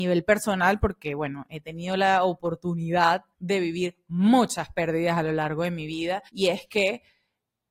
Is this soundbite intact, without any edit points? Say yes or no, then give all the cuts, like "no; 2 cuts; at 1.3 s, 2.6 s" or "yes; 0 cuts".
no; 2 cuts; at 3.3 s, 6.3 s